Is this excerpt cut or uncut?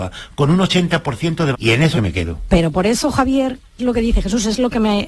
cut